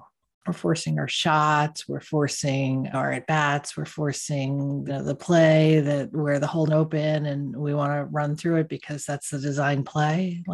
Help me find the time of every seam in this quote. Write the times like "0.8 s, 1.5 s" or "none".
4.9 s, 6.7 s